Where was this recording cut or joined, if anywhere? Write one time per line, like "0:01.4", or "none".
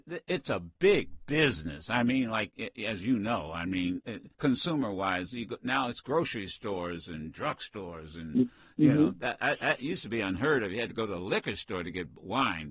0:04.3